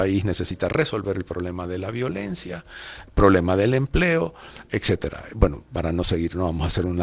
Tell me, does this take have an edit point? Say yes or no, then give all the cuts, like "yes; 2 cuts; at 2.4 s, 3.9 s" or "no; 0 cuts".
no; 0 cuts